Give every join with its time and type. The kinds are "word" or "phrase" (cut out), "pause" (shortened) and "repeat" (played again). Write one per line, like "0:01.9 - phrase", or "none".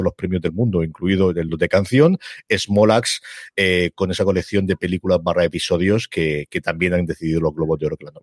none